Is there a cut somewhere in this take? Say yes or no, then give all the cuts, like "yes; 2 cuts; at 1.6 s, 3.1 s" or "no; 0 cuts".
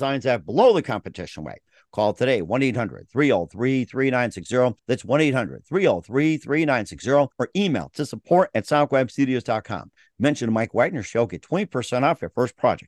yes; 2 cuts; at 4.8 s, 7.3 s